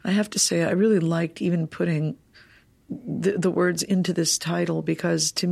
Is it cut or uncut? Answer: uncut